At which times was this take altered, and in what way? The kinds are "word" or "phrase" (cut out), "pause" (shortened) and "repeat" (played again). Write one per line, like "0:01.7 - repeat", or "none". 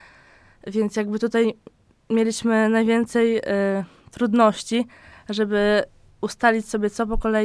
none